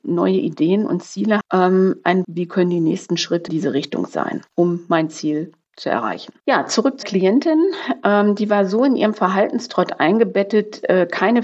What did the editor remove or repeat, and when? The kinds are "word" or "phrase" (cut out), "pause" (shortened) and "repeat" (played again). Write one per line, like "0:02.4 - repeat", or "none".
0:01.4 - word
0:02.2 - word
0:03.5 - word
0:04.5 - pause
0:06.4 - pause
0:07.0 - word